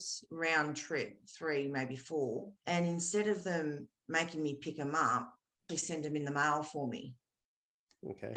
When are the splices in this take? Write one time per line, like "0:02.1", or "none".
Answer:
0:02.6
0:05.7